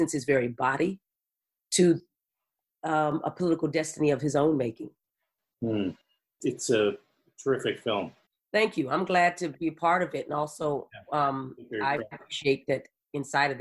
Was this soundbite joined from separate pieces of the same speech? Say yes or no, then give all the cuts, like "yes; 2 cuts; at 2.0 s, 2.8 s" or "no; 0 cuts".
no; 0 cuts